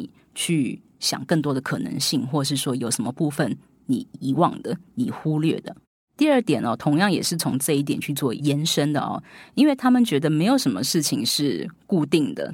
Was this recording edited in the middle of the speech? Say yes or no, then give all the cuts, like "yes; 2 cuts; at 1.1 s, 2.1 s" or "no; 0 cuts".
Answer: no; 0 cuts